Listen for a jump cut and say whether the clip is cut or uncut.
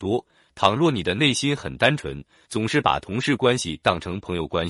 uncut